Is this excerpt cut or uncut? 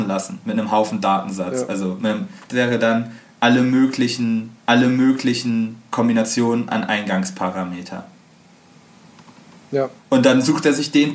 cut